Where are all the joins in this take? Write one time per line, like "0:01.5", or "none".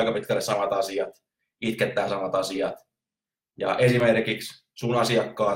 none